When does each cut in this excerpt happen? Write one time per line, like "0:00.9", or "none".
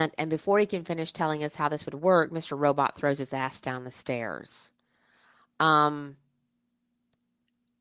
none